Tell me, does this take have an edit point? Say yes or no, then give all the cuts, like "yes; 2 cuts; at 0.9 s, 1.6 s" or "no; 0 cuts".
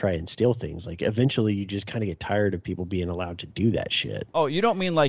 no; 0 cuts